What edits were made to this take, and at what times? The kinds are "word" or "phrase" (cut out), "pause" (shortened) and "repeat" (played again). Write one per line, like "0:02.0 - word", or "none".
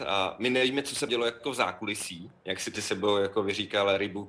0:01.1 - word
0:02.8 - word